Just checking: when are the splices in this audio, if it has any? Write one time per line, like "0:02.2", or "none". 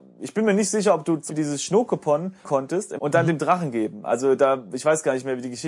0:01.3
0:02.4
0:03.0